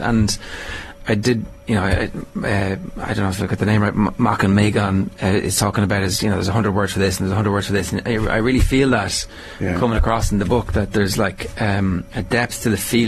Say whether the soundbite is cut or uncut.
cut